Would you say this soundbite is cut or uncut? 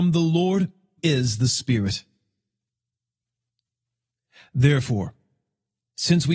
cut